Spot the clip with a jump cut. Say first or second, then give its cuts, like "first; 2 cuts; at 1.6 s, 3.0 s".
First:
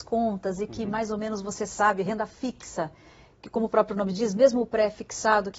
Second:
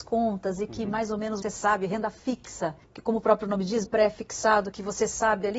second; 3 cuts; at 1.4 s, 2.8 s, 3.8 s